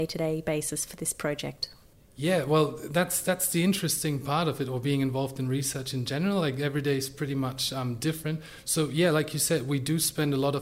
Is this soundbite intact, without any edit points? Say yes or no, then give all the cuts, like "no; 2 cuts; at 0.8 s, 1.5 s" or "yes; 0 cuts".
yes; 0 cuts